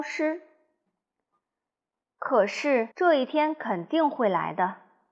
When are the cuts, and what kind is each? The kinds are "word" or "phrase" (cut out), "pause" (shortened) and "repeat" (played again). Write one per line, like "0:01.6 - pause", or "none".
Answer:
0:02.9 - pause